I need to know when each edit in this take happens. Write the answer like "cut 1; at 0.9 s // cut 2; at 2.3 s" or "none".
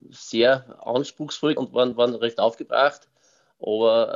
cut 1; at 1.6 s